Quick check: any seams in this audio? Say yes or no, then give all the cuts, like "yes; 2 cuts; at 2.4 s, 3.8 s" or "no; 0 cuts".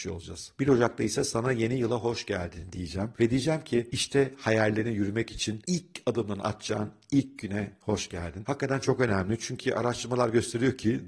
no; 0 cuts